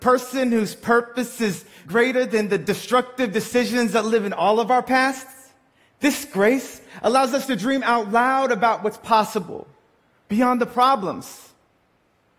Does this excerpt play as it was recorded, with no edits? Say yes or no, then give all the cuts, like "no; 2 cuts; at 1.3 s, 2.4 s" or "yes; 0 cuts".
yes; 0 cuts